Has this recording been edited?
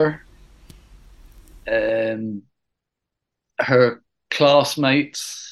no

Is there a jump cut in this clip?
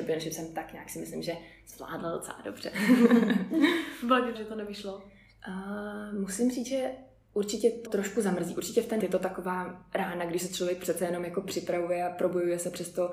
yes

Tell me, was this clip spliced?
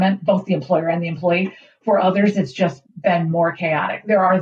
no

